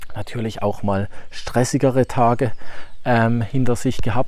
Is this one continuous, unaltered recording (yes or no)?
yes